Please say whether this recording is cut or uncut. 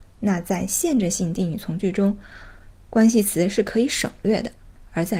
uncut